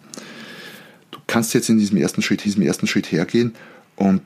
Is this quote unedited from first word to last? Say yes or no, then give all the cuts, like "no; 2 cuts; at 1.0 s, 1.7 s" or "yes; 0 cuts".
no; 2 cuts; at 1.2 s, 2.4 s